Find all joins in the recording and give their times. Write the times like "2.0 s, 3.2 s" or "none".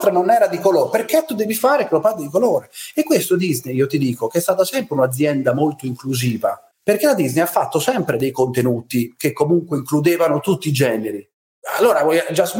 6.7 s